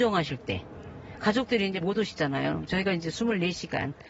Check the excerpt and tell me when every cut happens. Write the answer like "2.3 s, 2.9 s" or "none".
1.8 s